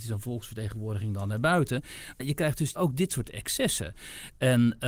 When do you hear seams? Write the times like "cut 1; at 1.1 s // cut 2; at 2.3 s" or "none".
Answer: cut 1; at 2.2 s // cut 2; at 2.7 s